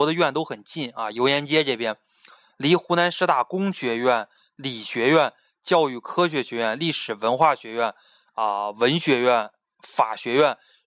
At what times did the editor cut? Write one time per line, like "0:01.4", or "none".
none